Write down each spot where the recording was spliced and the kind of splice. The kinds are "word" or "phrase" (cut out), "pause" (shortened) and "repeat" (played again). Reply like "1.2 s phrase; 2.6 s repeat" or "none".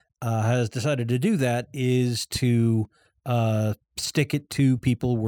none